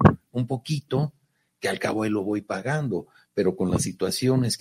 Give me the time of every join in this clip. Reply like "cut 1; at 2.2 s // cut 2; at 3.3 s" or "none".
none